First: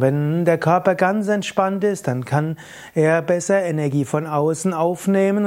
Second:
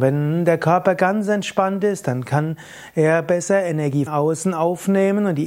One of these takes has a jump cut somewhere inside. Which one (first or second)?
second